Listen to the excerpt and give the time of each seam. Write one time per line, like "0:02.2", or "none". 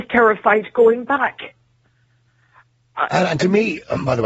none